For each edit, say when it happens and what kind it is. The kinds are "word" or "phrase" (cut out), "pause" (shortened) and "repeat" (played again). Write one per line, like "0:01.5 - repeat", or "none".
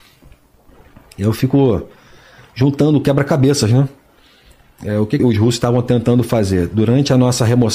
0:05.2 - word